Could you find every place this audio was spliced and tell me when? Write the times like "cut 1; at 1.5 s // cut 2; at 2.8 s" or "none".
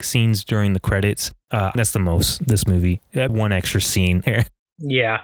cut 1; at 1.7 s // cut 2; at 3.3 s // cut 3; at 4.2 s